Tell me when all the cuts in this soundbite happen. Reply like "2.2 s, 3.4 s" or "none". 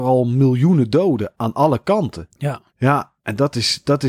1.3 s, 2.7 s